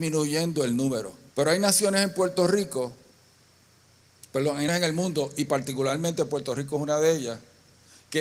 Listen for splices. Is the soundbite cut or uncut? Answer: cut